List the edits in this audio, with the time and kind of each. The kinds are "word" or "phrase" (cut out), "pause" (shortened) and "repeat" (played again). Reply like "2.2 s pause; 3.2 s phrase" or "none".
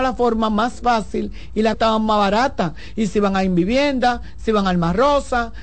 1.7 s word